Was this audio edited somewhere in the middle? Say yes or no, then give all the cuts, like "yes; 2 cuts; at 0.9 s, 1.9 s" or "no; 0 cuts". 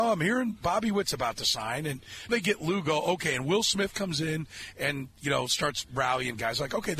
yes; 1 cut; at 2.3 s